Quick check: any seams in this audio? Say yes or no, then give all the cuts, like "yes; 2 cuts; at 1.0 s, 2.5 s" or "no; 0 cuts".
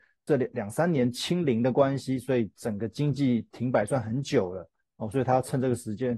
no; 0 cuts